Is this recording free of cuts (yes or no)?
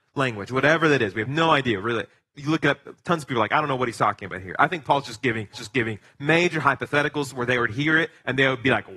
no